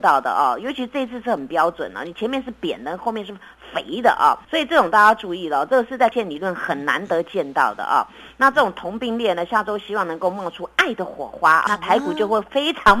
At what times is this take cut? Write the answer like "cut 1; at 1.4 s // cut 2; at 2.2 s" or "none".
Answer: cut 1; at 4.4 s // cut 2; at 6.1 s // cut 3; at 11.7 s